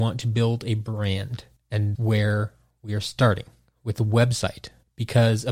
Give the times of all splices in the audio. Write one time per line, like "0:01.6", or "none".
0:02.0